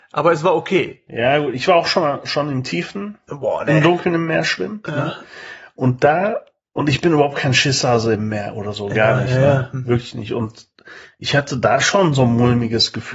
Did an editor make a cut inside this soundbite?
no; 0 cuts

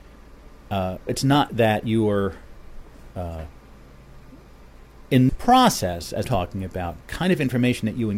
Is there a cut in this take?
yes; 5 cuts; at 1.1 s, 1.5 s, 5.3 s, 6.2 s, 7.0 s

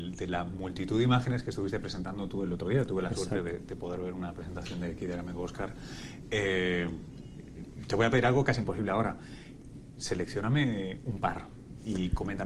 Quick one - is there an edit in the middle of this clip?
no; 0 cuts

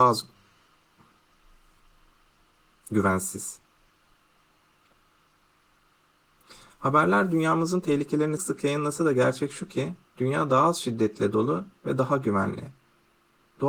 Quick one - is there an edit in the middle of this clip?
yes; 2 cuts; at 8.4 s, 10.0 s

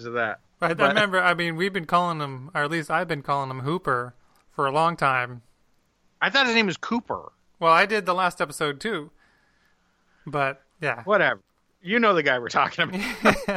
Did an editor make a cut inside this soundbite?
yes; 1 cut; at 10.7 s

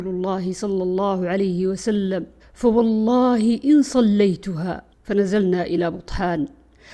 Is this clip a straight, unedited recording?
no; 2 cuts; at 2.4 s, 4.9 s

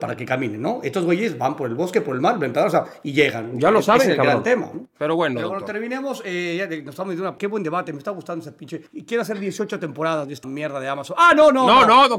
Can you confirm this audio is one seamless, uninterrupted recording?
no; 3 cuts; at 7.4 s, 8.9 s, 10.4 s

